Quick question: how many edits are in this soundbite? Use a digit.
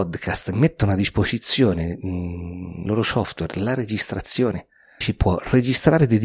2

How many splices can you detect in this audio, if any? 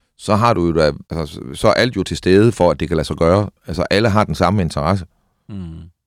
2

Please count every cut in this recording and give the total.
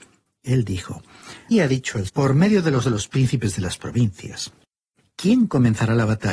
3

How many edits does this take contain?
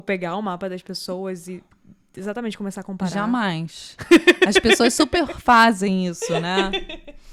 0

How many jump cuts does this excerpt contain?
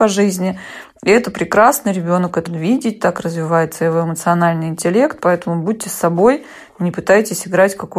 1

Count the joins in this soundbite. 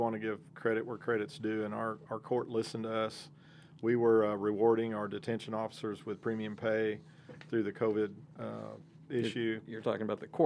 0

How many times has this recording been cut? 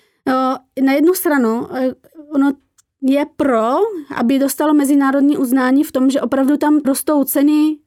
1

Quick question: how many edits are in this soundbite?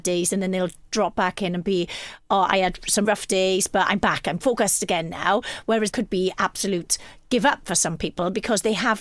2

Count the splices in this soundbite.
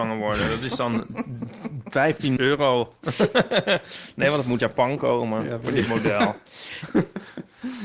2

